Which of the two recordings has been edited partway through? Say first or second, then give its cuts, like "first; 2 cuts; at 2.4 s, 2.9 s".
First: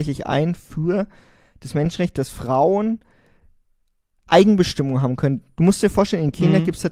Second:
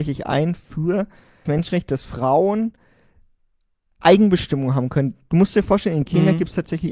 second; 1 cut; at 1.5 s